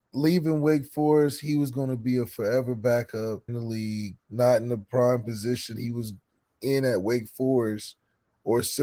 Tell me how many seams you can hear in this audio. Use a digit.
3